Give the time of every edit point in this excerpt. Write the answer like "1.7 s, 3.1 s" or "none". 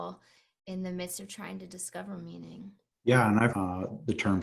3.5 s